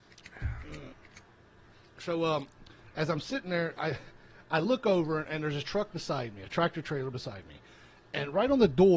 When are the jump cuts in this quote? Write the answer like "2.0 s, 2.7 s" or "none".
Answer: none